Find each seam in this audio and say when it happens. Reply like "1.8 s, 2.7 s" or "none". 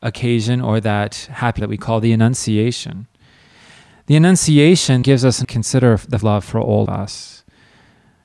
1.6 s, 5.0 s, 5.4 s, 6.2 s, 6.9 s

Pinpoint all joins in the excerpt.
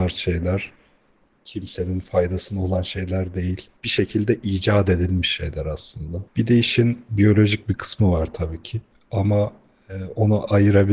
3.8 s, 6.3 s

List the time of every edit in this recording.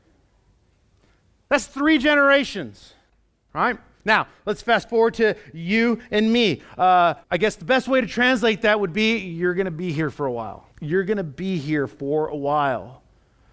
3.1 s, 7.2 s, 10.7 s

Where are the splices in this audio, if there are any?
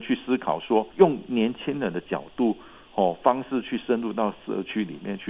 0.9 s

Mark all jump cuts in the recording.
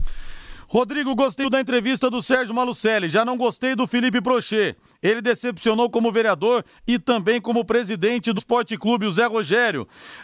1.4 s, 8.4 s

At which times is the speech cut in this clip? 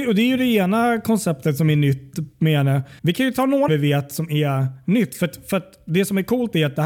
3.0 s, 3.7 s

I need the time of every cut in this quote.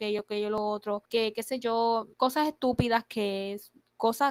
1.1 s, 2.1 s

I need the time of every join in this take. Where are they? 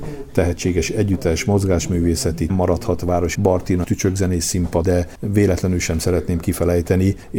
2.5 s, 3.3 s, 3.8 s, 4.8 s

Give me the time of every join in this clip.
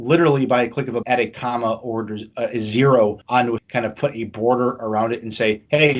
1.0 s, 3.2 s, 3.6 s

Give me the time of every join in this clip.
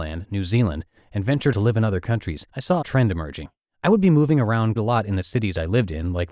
1.5 s, 2.5 s, 2.8 s, 3.6 s, 4.8 s

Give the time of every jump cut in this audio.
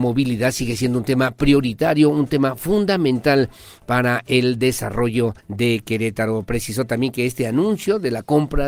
5.4 s

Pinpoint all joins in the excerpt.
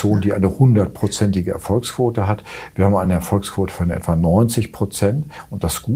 none

